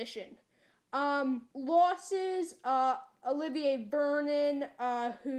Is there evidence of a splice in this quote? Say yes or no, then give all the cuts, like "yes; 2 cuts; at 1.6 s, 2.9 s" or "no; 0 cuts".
yes; 1 cut; at 1.5 s